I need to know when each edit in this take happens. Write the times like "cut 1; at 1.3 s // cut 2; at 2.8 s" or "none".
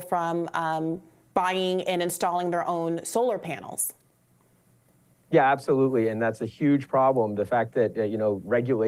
none